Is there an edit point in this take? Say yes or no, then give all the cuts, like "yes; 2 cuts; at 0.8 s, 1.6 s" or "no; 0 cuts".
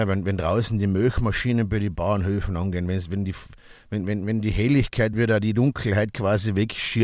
no; 0 cuts